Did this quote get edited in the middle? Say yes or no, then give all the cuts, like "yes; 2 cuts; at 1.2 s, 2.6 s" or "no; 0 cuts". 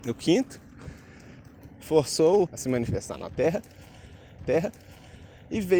yes; 2 cuts; at 2.5 s, 4.4 s